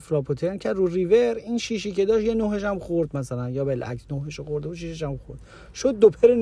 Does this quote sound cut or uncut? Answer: uncut